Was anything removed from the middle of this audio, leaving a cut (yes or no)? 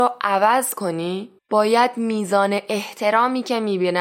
yes